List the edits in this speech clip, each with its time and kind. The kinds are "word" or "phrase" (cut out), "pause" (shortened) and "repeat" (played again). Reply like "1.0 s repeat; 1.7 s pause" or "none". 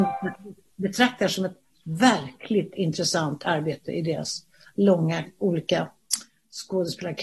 none